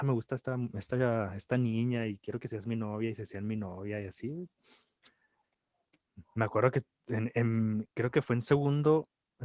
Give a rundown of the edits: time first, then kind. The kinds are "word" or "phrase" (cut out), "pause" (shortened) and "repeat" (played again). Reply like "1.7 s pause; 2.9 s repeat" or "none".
7.9 s pause